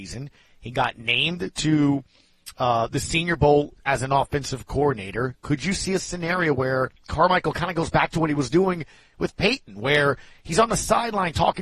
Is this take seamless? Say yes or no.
yes